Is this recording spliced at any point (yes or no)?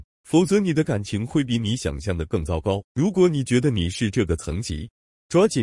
yes